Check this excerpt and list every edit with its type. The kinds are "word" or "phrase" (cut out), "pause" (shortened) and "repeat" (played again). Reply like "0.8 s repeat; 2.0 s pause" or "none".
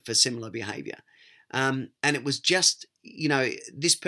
2.0 s pause